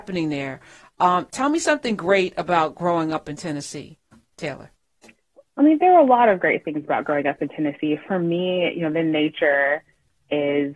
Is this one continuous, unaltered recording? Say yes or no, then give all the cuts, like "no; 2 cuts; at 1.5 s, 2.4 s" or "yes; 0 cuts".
yes; 0 cuts